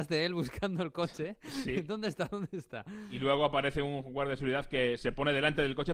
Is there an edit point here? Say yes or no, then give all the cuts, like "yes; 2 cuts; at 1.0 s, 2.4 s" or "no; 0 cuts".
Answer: no; 0 cuts